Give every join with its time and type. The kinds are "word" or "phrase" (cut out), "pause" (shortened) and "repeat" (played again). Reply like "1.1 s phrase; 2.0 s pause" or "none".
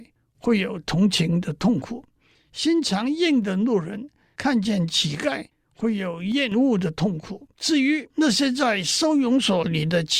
7.5 s pause